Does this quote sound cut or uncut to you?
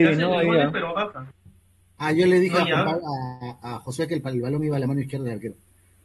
uncut